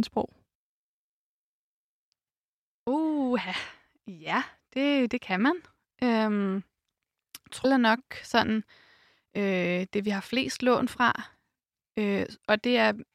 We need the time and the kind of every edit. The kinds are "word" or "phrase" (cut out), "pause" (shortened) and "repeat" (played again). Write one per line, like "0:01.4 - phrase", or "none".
0:07.6 - phrase